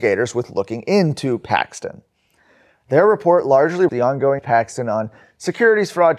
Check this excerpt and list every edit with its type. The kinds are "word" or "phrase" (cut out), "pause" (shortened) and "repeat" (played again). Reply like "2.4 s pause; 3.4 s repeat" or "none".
3.9 s word; 4.4 s word

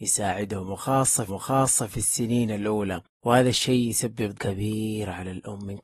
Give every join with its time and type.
1.3 s repeat; 3.1 s pause; 4.3 s word

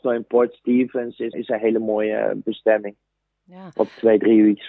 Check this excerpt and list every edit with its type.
1.3 s word

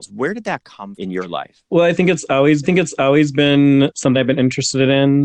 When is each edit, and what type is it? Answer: 0.9 s word; 1.7 s pause; 2.6 s repeat; 4.1 s word

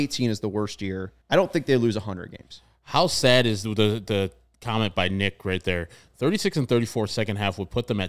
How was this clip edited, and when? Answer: 1.2 s pause

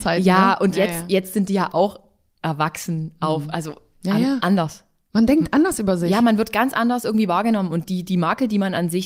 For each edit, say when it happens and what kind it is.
none

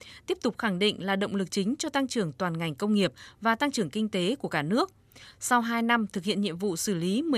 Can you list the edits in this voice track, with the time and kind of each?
none

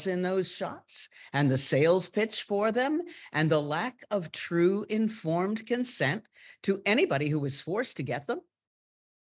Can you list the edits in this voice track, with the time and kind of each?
none

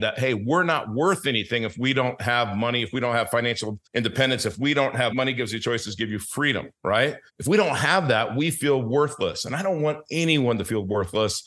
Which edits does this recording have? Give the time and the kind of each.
3.8 s pause; 5.1 s word; 5.6 s word; 7.3 s pause

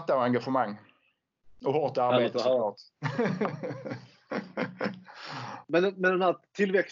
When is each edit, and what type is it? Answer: 5.6 s pause

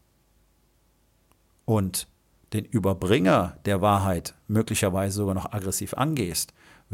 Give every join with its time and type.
none

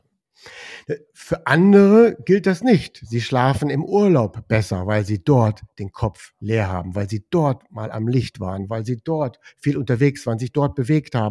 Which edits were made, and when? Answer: none

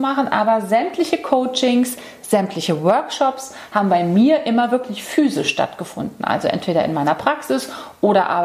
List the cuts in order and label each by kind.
none

